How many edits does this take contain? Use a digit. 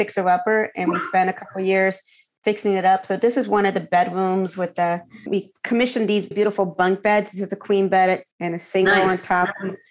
3